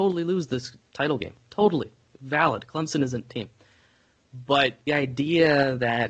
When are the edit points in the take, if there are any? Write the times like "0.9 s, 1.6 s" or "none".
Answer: 3.3 s, 4.9 s